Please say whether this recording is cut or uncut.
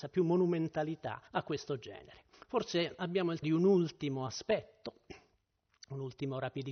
cut